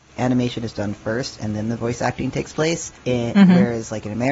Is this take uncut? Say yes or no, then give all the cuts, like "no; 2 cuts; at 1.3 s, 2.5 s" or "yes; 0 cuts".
no; 1 cut; at 3.0 s